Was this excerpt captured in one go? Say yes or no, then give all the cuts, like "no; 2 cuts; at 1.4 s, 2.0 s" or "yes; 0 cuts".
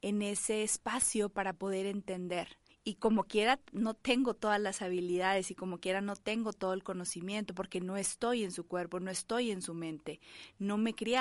no; 1 cut; at 2.7 s